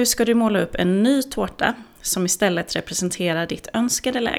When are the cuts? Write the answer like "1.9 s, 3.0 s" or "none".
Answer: none